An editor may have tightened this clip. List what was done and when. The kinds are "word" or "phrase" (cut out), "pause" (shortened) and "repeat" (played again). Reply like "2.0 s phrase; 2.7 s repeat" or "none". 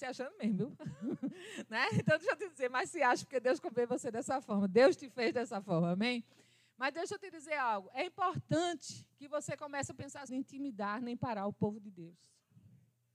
10.3 s phrase